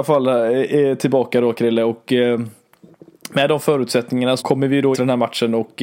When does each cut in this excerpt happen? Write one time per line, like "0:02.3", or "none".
0:04.4
0:04.9

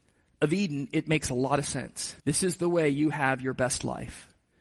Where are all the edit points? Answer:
0:02.2

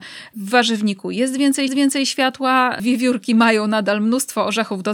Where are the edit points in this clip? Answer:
0:01.7

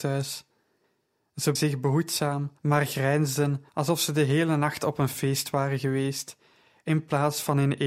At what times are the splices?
0:01.6
0:02.6
0:03.7

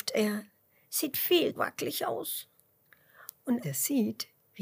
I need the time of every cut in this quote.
0:01.6
0:03.6

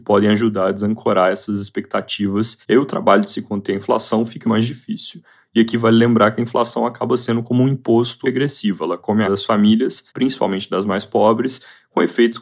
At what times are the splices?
0:02.6
0:04.4
0:08.2
0:09.3
0:10.1

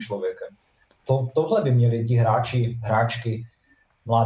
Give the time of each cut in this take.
none

